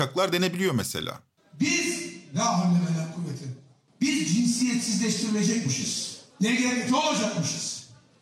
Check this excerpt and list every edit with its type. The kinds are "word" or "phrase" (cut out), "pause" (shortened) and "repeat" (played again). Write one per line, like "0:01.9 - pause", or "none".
0:06.3 - pause

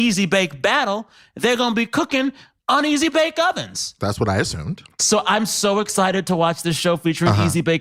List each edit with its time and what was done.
none

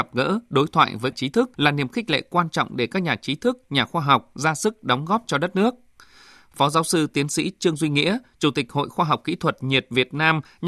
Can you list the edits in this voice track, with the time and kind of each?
0:01.1 - phrase
0:01.5 - pause

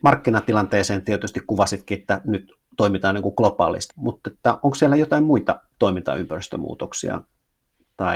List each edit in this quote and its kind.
0:03.9 - word

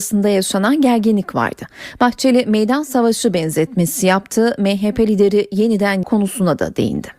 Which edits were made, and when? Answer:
0:06.0 - word

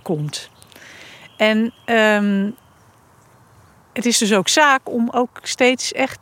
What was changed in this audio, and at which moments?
none

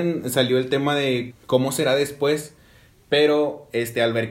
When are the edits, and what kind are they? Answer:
0:01.3 - word

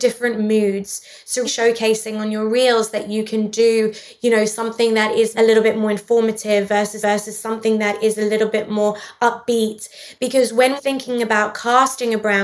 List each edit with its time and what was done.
0:01.4 - word
0:05.3 - word
0:07.0 - repeat
0:10.8 - word

